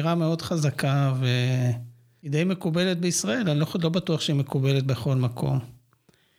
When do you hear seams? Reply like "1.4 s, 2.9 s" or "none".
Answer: none